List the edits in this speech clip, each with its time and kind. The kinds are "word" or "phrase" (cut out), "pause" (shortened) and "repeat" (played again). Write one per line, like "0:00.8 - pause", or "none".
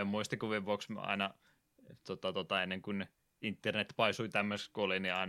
none